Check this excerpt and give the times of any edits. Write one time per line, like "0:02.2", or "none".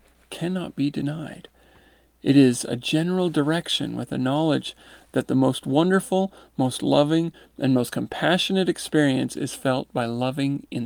none